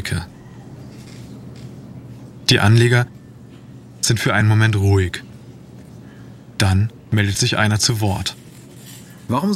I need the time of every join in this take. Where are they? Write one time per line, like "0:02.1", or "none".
none